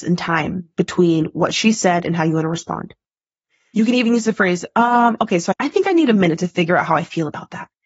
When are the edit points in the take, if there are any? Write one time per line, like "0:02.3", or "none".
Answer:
none